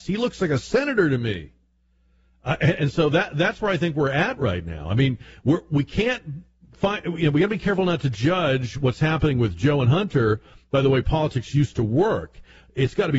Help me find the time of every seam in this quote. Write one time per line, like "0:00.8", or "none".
none